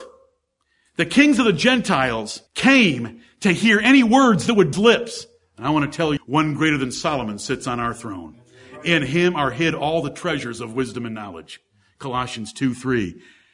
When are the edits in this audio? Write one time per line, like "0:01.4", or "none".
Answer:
0:02.5
0:04.7
0:06.2